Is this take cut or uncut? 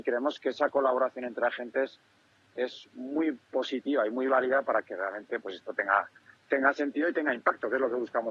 uncut